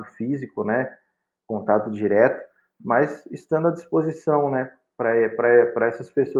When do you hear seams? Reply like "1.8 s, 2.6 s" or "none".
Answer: none